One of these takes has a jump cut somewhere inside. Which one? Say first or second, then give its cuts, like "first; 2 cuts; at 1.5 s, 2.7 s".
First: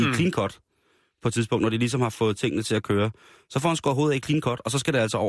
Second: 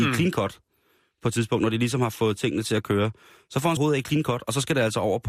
second; 1 cut; at 3.8 s